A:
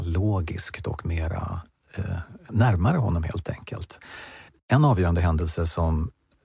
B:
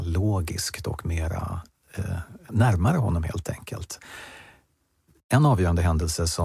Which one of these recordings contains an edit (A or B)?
A